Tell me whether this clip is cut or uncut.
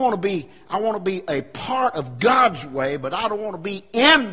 uncut